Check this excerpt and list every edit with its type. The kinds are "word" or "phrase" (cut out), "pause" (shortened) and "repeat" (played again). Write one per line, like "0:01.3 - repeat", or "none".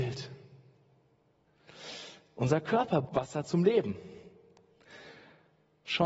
0:03.0 - word